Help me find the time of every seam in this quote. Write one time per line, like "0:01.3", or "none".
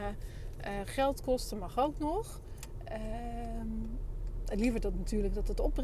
none